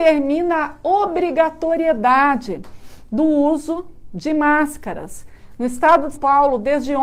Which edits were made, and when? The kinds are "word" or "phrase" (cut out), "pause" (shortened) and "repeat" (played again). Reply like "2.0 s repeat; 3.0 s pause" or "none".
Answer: 6.1 s word